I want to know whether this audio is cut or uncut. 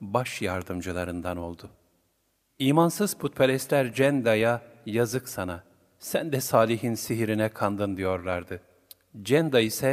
uncut